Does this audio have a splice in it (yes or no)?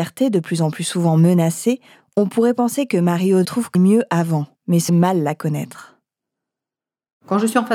yes